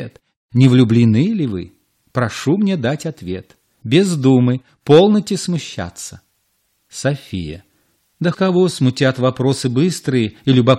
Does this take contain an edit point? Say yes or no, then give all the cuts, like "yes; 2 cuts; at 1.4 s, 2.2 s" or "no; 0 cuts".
yes; 1 cut; at 8.3 s